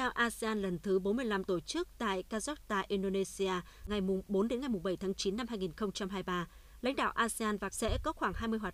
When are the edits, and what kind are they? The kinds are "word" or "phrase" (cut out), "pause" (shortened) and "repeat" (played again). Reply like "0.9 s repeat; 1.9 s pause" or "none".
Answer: 1.5 s word; 7.7 s phrase